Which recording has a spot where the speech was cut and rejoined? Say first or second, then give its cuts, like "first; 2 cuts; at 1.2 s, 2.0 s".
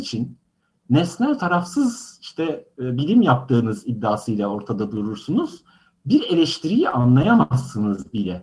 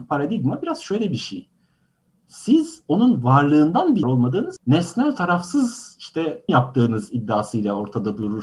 second; 3 cuts; at 4.0 s, 4.6 s, 6.5 s